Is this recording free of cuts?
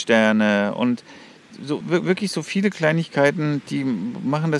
no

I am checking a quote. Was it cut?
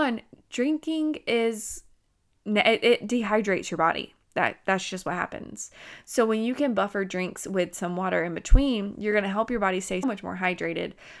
yes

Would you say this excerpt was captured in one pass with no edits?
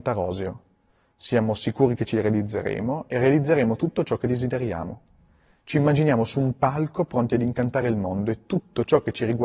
yes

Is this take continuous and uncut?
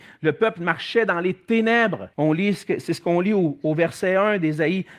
no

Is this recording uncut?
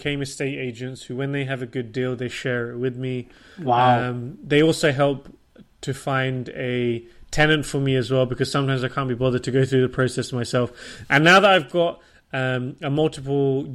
yes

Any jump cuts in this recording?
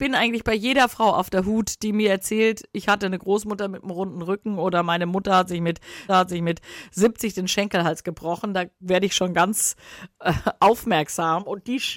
yes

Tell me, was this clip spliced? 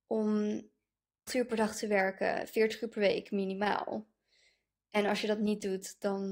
yes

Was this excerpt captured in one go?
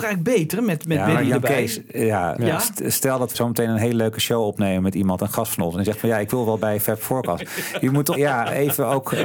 no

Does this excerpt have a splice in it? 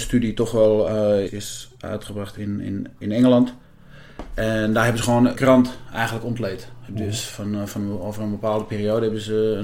yes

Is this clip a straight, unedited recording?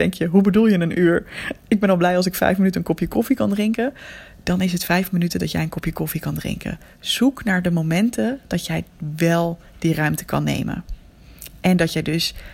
yes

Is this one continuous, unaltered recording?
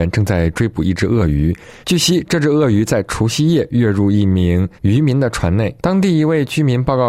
no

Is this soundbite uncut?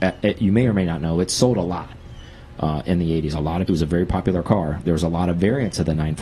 no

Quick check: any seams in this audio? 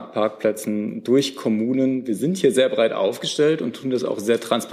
no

